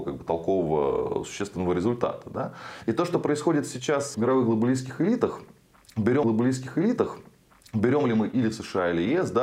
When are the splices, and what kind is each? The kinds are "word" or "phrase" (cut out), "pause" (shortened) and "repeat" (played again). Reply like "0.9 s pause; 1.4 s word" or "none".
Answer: 4.1 s word; 6.2 s repeat